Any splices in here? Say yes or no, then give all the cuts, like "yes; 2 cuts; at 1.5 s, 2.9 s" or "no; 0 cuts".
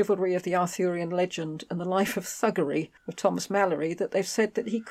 yes; 1 cut; at 3.0 s